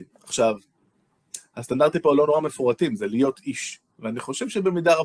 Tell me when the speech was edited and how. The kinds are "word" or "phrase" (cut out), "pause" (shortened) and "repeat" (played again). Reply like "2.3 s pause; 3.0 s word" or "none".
none

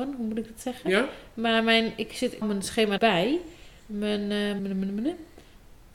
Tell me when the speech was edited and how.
2.4 s word; 3.0 s phrase; 4.6 s word

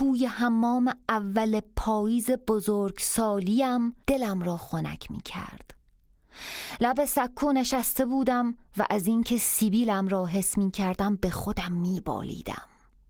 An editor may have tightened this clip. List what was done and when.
4.0 s pause; 8.7 s pause

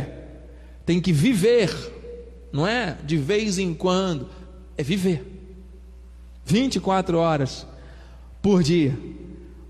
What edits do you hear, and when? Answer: none

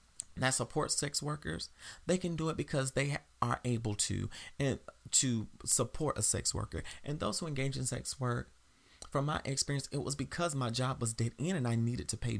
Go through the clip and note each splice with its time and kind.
none

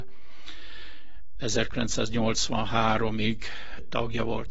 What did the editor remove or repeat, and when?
none

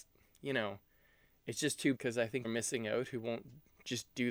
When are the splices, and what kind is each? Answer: 2.0 s word; 2.4 s word

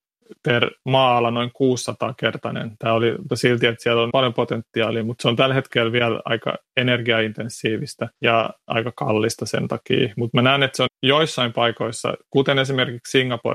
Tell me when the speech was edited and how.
3.3 s phrase; 4.1 s word; 8.2 s pause; 10.9 s word

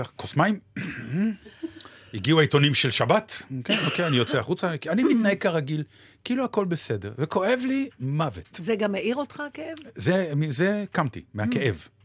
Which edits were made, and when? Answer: none

